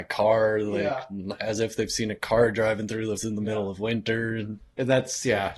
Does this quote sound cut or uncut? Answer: cut